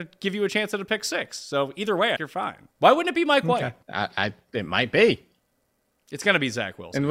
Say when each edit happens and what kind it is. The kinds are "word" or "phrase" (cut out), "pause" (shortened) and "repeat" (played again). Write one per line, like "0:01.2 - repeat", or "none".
0:02.2 - phrase
0:02.7 - pause
0:03.8 - pause